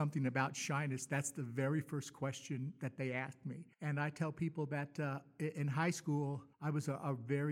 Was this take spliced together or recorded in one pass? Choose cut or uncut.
cut